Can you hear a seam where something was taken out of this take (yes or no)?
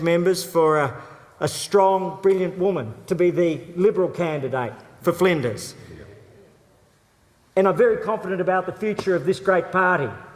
no